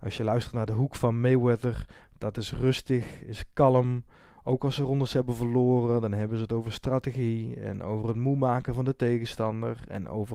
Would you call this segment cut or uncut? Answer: uncut